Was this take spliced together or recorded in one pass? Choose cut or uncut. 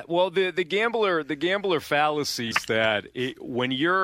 cut